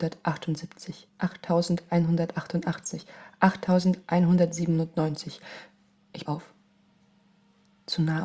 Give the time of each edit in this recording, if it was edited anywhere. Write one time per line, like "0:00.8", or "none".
0:01.1
0:06.3